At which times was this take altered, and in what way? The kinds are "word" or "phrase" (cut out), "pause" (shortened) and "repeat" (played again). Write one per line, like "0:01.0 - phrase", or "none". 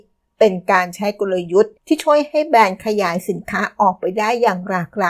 0:01.8 - pause